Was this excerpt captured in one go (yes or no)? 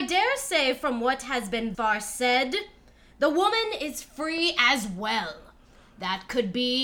no